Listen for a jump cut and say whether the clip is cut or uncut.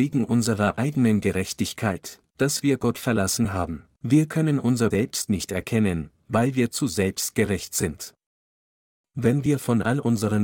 cut